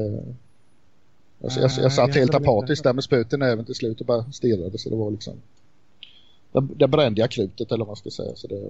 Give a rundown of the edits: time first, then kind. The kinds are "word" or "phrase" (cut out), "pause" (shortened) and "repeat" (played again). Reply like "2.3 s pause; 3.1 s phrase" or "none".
1.7 s repeat